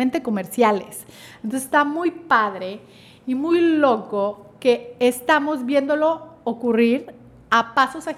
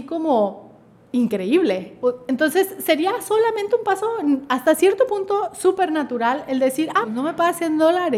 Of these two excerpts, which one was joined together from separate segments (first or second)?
second